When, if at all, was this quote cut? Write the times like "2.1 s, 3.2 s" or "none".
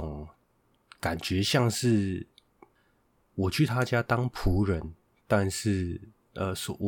none